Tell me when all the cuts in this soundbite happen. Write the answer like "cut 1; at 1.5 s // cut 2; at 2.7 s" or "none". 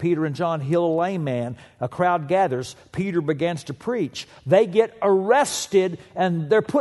none